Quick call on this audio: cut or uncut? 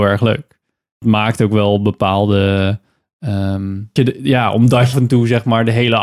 cut